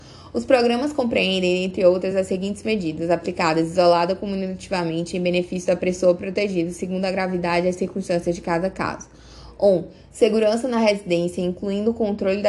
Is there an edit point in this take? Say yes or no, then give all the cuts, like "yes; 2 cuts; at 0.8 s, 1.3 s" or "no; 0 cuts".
no; 0 cuts